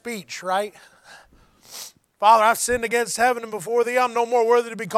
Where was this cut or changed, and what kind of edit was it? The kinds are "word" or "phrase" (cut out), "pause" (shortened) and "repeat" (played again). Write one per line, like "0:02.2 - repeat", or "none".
none